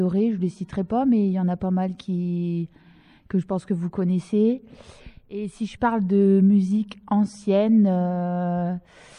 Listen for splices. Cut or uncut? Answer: uncut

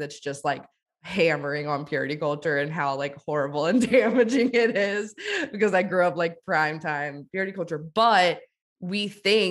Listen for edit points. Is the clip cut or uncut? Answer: uncut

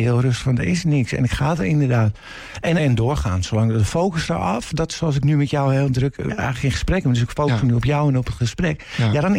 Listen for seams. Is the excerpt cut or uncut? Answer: cut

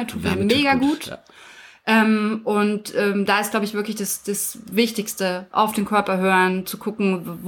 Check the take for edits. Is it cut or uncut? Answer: uncut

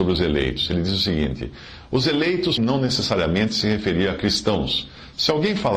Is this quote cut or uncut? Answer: cut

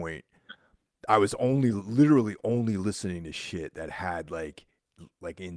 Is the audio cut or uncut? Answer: uncut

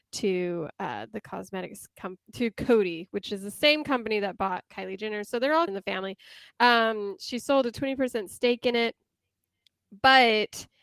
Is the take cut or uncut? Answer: cut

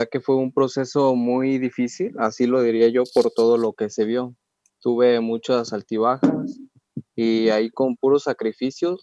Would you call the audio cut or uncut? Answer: uncut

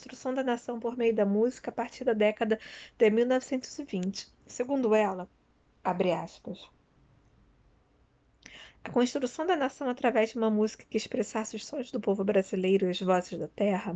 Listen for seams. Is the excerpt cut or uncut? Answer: uncut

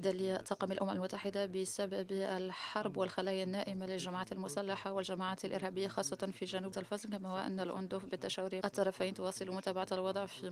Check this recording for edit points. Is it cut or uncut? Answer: cut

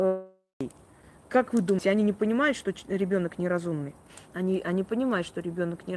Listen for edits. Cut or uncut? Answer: cut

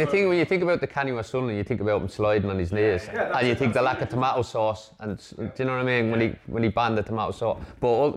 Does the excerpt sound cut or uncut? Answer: uncut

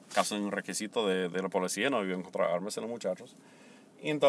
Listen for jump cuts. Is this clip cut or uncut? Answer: uncut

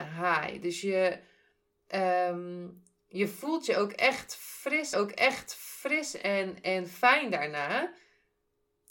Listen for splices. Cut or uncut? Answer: cut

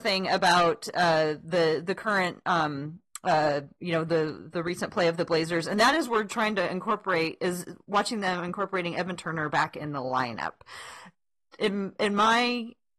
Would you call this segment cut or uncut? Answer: uncut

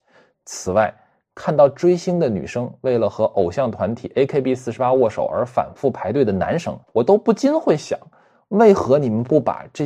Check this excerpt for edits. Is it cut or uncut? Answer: cut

